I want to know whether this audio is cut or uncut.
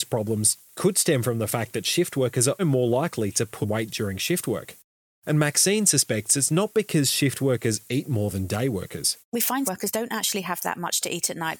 cut